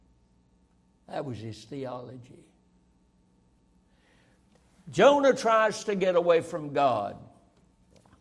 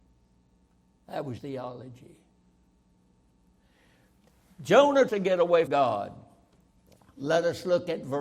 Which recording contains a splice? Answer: second; 3 cuts; at 1.4 s, 5.1 s, 5.7 s

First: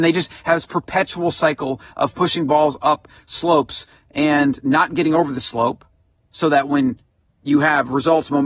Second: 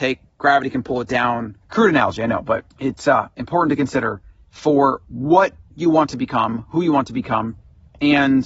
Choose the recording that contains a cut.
second; 3 cuts; at 1.6 s, 2.7 s, 4.4 s

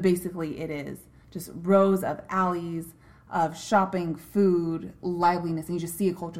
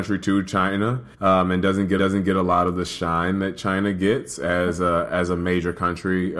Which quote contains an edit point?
second; 2 cuts; at 1.1 s, 2.0 s

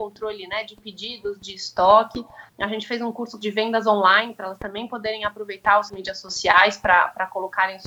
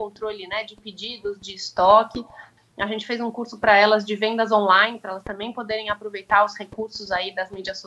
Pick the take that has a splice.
first; 3 cuts; at 2.5 s, 3.4 s, 5.9 s

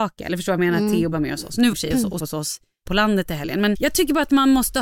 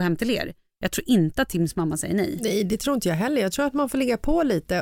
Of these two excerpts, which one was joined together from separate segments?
first; 5 cuts; at 1.1 s, 1.7 s, 2.2 s, 2.8 s, 3.7 s

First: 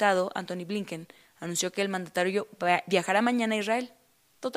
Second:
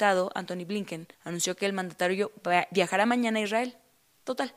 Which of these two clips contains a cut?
second; 1 cut; at 1.1 s

